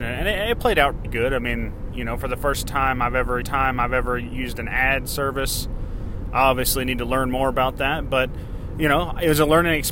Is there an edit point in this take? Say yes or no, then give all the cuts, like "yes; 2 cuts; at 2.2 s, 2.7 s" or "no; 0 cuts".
yes; 2 cuts; at 1.0 s, 3.4 s